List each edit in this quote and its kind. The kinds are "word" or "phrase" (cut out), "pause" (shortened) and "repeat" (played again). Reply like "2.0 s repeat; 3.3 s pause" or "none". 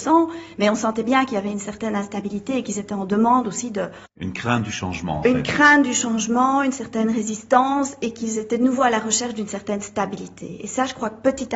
none